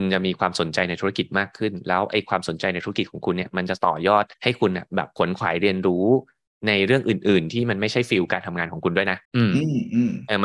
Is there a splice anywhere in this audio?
yes; 2 cuts; at 4.3 s, 9.2 s

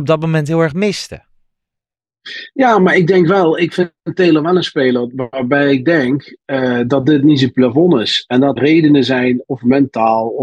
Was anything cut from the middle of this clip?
yes; 1 cut; at 8.6 s

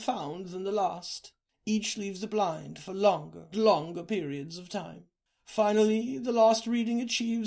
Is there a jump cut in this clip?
yes; 2 cuts; at 2.3 s, 3.5 s

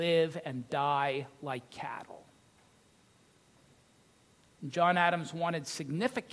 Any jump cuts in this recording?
no; 0 cuts

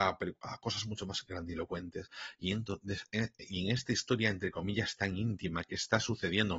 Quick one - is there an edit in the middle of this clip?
no; 0 cuts

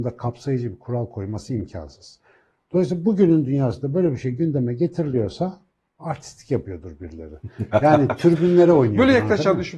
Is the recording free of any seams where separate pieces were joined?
yes; 0 cuts

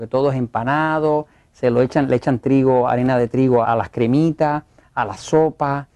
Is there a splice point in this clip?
yes; 1 cut; at 3.6 s

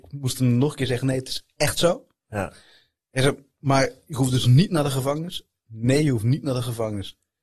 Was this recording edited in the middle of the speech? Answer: no; 0 cuts

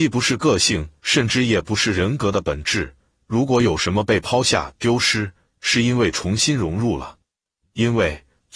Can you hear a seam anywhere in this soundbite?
no; 0 cuts

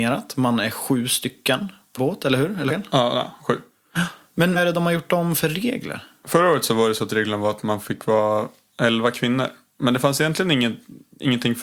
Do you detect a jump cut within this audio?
yes; 3 cuts; at 2.0 s, 2.7 s, 4.6 s

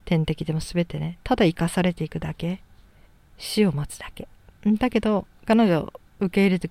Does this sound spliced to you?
yes; 1 cut; at 3.1 s

